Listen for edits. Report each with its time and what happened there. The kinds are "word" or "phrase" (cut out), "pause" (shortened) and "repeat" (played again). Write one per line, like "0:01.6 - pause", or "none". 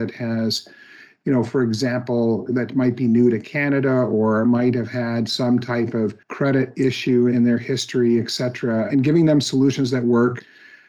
0:06.2 - pause